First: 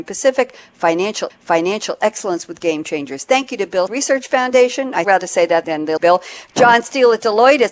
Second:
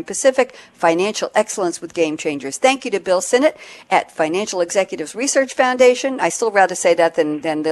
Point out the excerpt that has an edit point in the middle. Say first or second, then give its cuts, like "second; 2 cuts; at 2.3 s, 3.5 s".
first; 5 cuts; at 1.3 s, 3.9 s, 5.0 s, 5.6 s, 6.0 s